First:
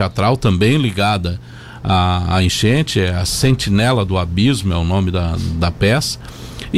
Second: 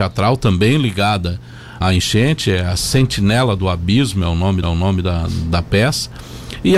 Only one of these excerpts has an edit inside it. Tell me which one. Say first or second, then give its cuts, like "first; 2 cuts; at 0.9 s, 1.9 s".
second; 2 cuts; at 1.8 s, 4.6 s